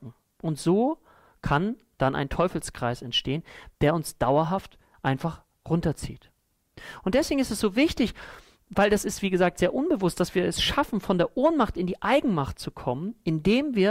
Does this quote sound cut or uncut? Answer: uncut